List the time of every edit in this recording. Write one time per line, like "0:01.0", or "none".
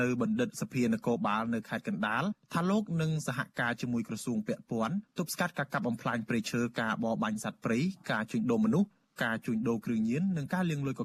none